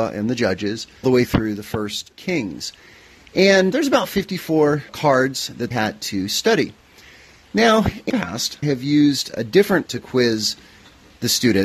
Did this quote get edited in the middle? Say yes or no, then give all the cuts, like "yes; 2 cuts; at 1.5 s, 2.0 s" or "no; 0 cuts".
yes; 8 cuts; at 1.0 s, 2.1 s, 3.7 s, 4.9 s, 5.7 s, 8.1 s, 8.6 s, 9.9 s